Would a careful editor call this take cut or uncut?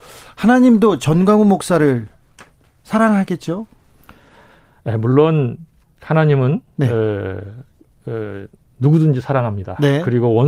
uncut